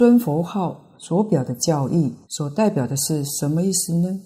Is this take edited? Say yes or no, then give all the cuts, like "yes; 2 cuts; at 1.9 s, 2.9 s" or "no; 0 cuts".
yes; 2 cuts; at 0.9 s, 2.2 s